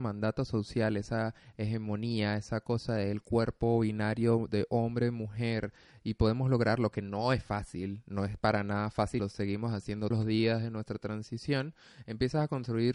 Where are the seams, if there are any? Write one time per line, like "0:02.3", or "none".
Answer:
0:09.2
0:10.1